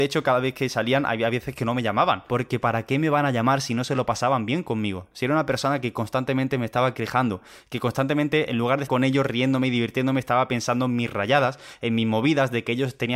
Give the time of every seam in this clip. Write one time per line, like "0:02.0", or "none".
0:08.9

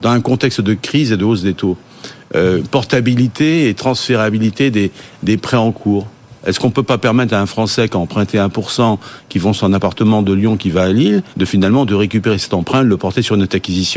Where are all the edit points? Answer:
0:11.3

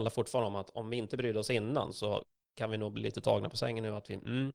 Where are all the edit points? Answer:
none

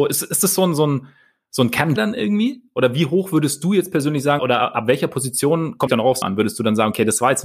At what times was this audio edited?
0:02.0
0:04.4
0:05.9
0:06.2

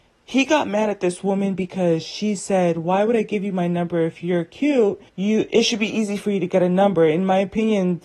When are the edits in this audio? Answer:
0:05.1

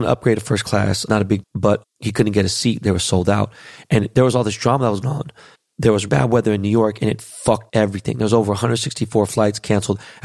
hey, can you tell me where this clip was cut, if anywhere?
0:01.1
0:01.4
0:01.8
0:05.0
0:05.5
0:06.1
0:07.7

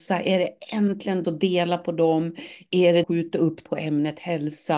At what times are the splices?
0:01.2
0:03.0
0:03.7

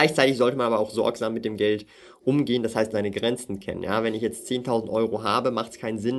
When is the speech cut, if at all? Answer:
0:02.9

